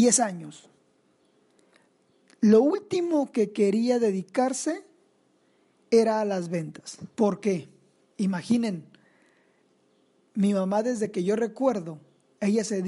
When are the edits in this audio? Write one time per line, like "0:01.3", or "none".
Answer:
0:07.1
0:07.9